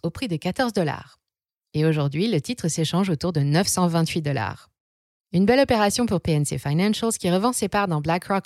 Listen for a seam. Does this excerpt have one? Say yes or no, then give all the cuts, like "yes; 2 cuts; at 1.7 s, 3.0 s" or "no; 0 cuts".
no; 0 cuts